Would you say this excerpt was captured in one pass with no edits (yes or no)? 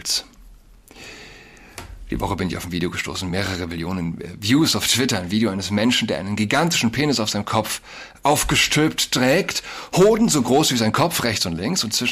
yes